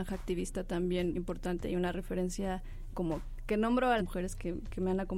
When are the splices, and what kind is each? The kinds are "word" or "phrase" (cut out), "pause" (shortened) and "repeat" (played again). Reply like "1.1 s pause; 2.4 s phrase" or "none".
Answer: 1.1 s word; 2.9 s word; 4.0 s word